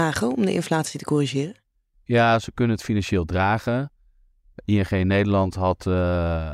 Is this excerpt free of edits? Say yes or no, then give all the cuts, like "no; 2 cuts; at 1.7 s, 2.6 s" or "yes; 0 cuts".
no; 1 cut; at 1.7 s